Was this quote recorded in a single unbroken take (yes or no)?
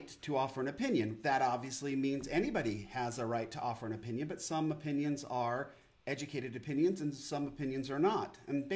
yes